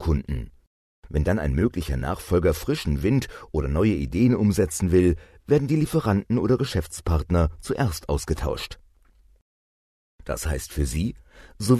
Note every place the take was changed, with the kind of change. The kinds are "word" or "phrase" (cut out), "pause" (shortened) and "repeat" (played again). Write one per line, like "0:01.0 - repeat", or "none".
none